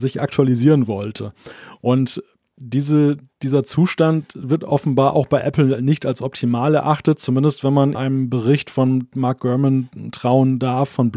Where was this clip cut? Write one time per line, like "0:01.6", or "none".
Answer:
0:07.9